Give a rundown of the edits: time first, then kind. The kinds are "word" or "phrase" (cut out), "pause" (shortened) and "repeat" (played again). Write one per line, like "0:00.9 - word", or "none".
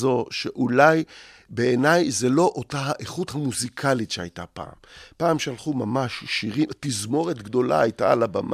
none